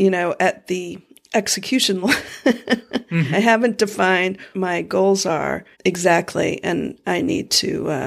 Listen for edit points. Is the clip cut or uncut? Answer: cut